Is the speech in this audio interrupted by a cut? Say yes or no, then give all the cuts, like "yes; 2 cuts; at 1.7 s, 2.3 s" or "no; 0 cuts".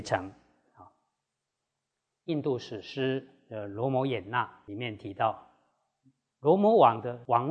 no; 0 cuts